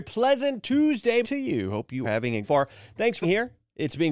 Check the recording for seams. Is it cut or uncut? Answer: cut